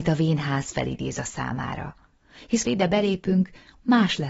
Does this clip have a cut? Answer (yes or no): yes